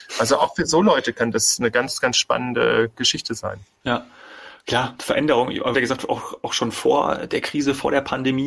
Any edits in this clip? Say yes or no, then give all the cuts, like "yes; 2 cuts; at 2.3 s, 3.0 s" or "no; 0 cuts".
yes; 1 cut; at 5.7 s